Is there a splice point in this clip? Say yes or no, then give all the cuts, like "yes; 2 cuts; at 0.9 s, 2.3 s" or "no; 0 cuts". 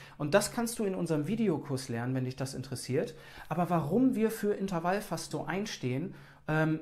yes; 1 cut; at 5.3 s